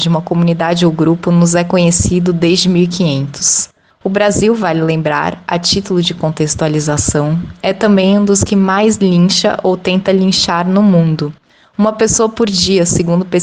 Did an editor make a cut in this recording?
no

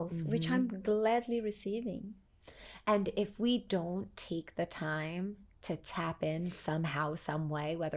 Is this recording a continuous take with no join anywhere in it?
yes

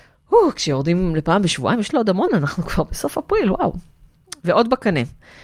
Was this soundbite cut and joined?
yes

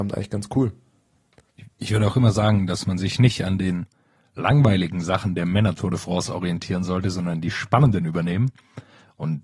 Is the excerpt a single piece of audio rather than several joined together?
yes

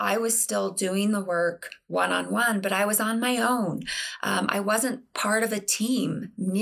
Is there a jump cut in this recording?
no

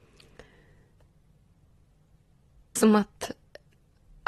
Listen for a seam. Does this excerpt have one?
yes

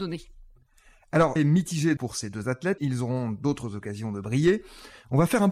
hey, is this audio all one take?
no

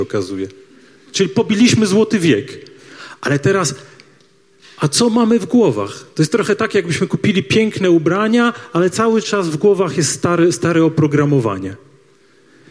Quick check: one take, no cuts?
yes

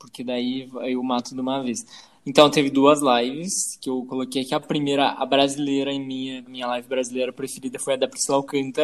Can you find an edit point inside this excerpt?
yes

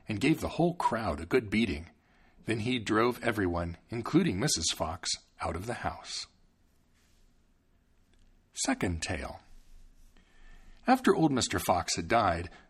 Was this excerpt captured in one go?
no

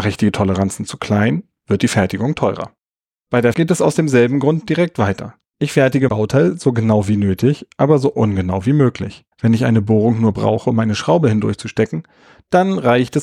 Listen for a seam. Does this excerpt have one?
yes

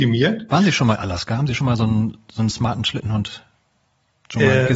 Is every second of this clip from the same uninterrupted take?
no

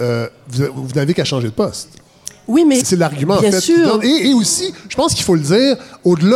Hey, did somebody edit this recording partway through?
yes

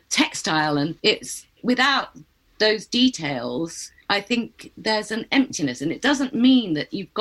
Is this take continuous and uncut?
no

